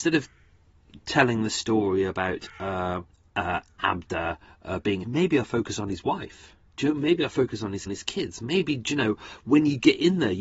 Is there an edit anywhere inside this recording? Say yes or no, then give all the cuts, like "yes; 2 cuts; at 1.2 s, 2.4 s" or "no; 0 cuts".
yes; 3 cuts; at 3.1 s, 5.0 s, 7.9 s